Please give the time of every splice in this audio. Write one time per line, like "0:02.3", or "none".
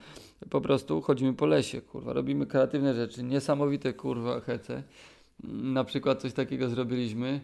none